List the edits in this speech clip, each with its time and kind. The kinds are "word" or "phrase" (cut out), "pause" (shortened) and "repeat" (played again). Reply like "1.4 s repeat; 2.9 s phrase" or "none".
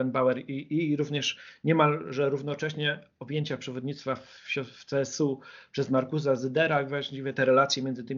none